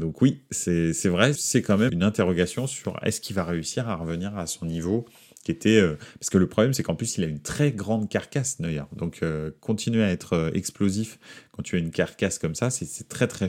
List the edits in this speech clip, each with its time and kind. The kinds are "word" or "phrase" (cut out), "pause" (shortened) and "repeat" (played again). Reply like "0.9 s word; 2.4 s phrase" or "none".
1.4 s word; 1.9 s word